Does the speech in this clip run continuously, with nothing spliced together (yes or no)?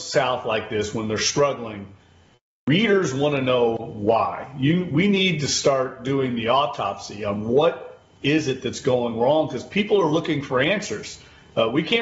yes